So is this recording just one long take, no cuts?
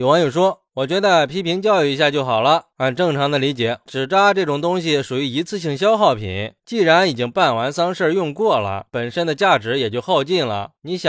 no; 1 cut; at 3.9 s

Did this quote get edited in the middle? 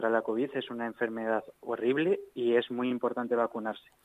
no; 0 cuts

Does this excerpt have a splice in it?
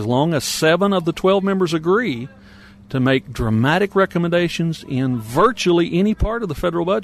no; 0 cuts

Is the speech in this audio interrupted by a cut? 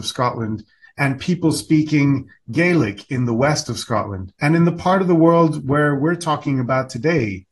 yes; 1 cut; at 4.4 s

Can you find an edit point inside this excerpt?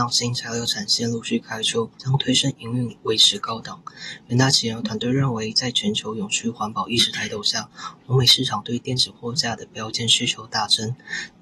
yes; 1 cut; at 1.9 s

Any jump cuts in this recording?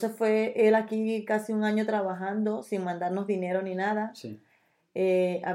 no; 0 cuts

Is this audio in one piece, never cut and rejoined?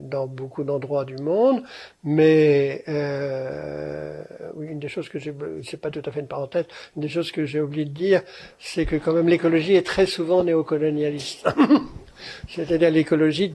yes; 0 cuts

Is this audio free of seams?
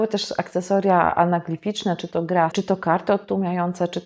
no; 1 cut; at 2.5 s

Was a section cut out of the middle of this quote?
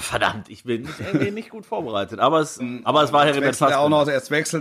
yes; 2 cuts; at 1.0 s, 2.6 s

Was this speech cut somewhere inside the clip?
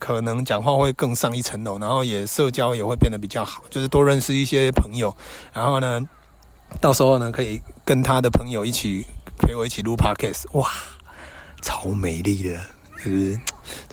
no; 0 cuts

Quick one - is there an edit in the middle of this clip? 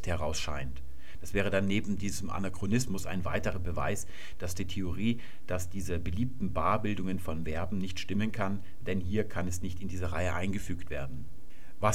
no; 0 cuts

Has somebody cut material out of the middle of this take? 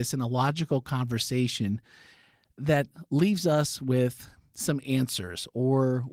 no; 0 cuts

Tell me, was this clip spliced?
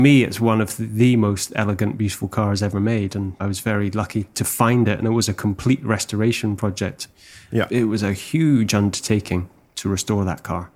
no; 0 cuts

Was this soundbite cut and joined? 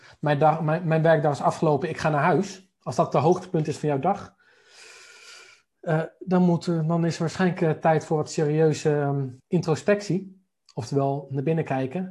yes; 2 cuts; at 2.8 s, 9.4 s

